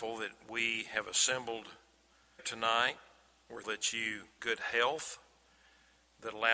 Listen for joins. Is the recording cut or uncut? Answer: cut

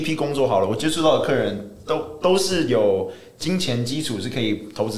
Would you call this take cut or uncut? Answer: uncut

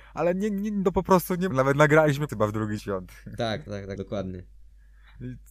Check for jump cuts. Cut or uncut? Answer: cut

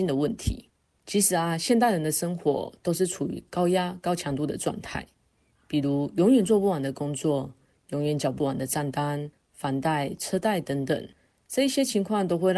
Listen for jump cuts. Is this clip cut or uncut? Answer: uncut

